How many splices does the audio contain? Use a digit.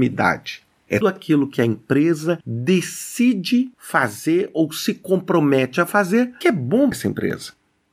3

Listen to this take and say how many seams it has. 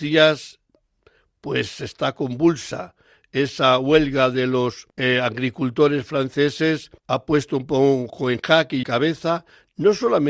3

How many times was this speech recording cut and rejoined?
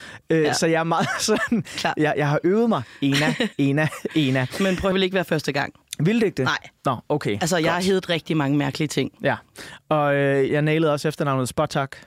3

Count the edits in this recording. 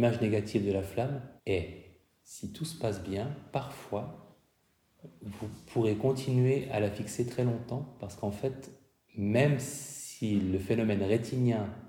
2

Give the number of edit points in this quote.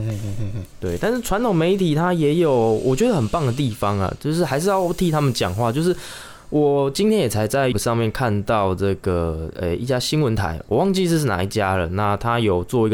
1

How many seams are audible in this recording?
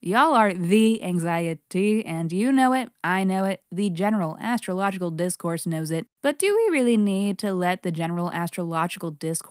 1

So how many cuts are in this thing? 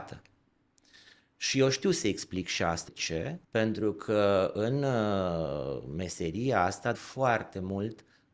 3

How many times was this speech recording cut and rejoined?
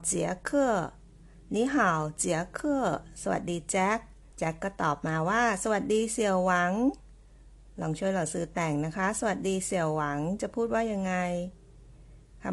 1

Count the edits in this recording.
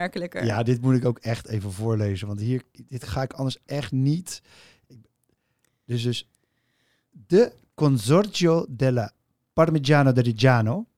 0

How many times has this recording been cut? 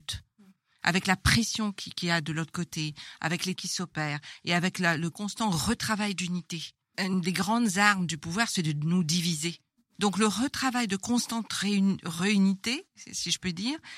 3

